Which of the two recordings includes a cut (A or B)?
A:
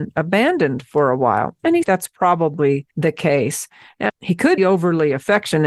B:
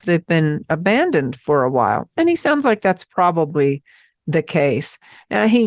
A